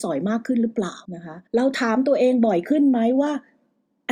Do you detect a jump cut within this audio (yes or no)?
yes